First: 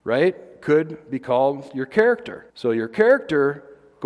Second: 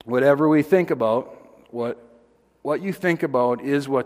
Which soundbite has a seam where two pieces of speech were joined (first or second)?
first